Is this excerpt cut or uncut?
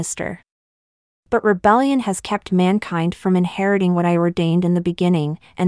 uncut